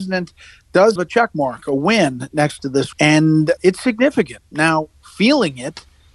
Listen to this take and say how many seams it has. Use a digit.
3